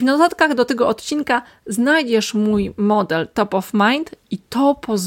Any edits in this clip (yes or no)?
no